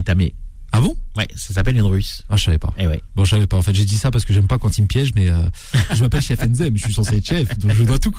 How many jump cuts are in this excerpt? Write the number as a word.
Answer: one